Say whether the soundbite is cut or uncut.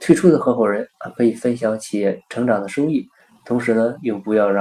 uncut